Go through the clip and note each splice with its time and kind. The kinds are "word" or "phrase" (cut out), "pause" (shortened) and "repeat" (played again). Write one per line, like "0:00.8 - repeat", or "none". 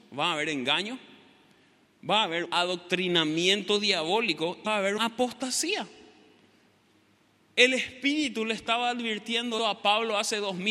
0:02.5 - word
0:04.7 - word
0:05.0 - word
0:09.6 - word